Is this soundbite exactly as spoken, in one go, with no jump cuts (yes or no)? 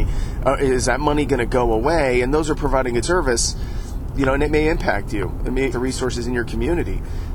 no